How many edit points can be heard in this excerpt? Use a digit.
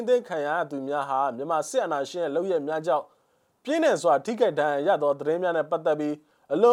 0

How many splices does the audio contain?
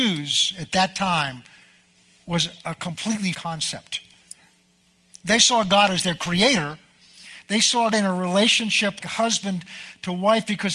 3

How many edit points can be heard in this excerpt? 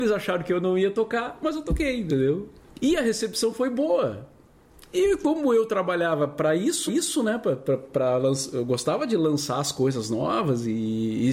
1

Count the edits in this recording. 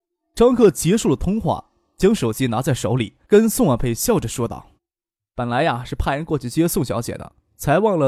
2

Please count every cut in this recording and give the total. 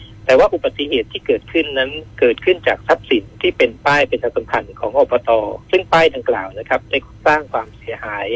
2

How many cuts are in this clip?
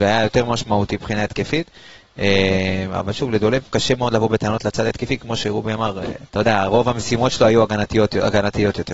1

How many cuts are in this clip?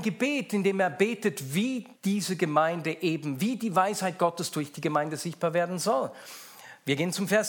1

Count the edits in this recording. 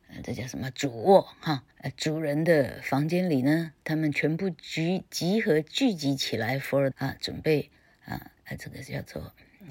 4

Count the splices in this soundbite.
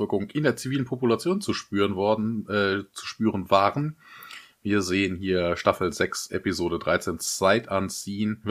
0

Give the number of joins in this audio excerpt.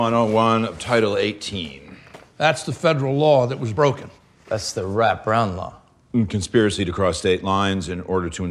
0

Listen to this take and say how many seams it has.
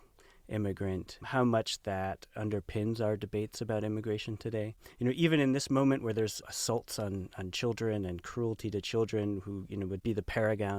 1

